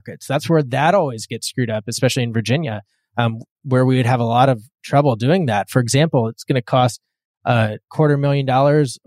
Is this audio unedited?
yes; 0 cuts

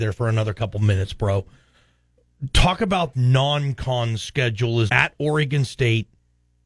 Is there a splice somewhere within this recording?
yes; 2 cuts; at 3.1 s, 4.9 s

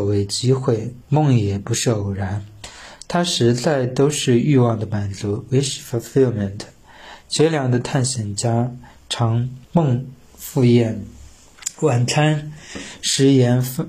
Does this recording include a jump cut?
yes; 2 cuts; at 1.0 s, 9.6 s

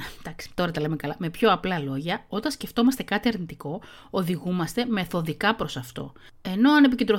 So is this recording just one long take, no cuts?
yes; 0 cuts

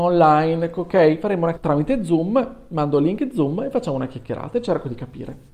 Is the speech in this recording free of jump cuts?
no; 1 cut; at 1.6 s

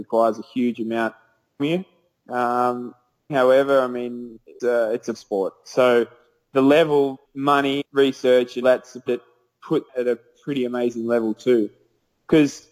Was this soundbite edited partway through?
yes; 9 cuts; at 1.6 s, 3.3 s, 4.6 s, 5.1 s, 7.2 s, 7.8 s, 8.6 s, 9.1 s, 9.9 s

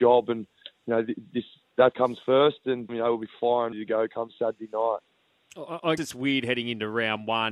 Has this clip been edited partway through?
yes; 4 cuts; at 1.9 s, 2.9 s, 3.7 s, 6.0 s

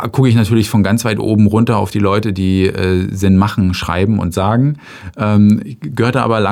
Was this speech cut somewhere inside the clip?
no; 0 cuts

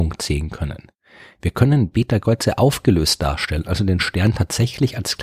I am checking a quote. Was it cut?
no; 0 cuts

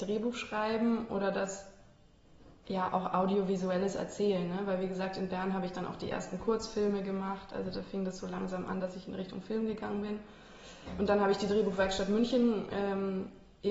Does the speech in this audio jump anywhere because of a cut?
no; 0 cuts

